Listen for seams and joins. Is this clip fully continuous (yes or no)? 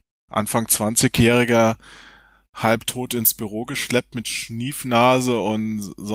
yes